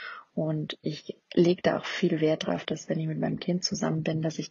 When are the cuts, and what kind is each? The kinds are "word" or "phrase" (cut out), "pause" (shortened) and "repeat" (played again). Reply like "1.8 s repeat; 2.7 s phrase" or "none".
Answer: 1.2 s pause